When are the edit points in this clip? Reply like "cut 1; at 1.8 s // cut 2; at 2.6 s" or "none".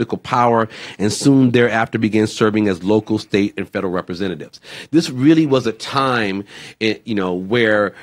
none